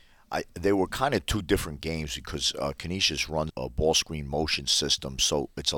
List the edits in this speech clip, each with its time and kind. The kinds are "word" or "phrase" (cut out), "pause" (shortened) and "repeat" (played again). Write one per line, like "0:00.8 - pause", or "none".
0:03.5 - word